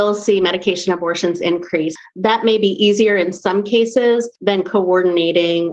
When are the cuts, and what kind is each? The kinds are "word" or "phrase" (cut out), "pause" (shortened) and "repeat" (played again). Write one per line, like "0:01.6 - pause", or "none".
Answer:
0:04.4 - pause